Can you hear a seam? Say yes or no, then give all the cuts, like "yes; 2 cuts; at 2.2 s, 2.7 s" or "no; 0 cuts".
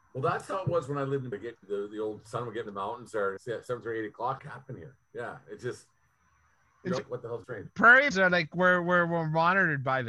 yes; 8 cuts; at 1.3 s, 1.6 s, 2.7 s, 3.4 s, 4.4 s, 7.0 s, 7.4 s, 8.1 s